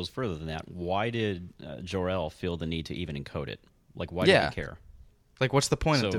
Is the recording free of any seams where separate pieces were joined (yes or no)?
yes